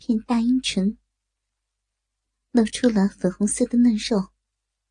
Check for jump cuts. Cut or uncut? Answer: uncut